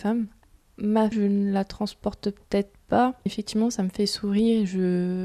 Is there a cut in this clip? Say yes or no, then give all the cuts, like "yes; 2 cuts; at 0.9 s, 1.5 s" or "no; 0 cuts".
yes; 2 cuts; at 1.1 s, 3.3 s